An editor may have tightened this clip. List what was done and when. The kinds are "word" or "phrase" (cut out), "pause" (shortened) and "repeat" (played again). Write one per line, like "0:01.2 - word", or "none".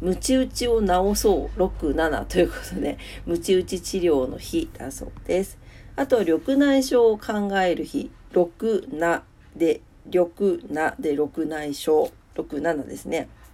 none